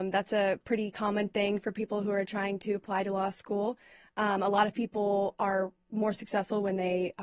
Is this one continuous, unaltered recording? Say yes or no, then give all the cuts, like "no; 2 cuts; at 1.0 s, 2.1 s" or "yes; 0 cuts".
yes; 0 cuts